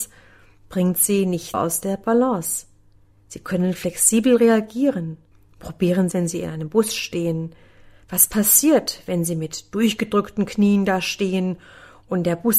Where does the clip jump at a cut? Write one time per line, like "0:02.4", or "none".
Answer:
0:01.5
0:05.3
0:06.1